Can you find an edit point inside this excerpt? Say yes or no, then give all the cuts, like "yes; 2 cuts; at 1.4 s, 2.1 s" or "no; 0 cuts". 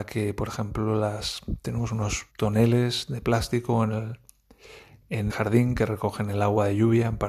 yes; 2 cuts; at 2.3 s, 5.3 s